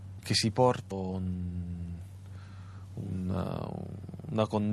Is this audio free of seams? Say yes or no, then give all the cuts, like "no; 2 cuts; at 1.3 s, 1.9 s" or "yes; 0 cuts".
no; 1 cut; at 0.9 s